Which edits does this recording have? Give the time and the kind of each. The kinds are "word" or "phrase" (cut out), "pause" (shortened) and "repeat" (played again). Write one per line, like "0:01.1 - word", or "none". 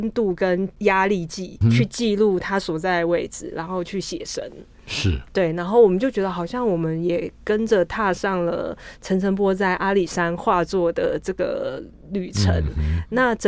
0:01.6 - word